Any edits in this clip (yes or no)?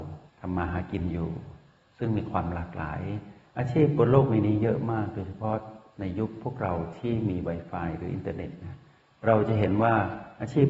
no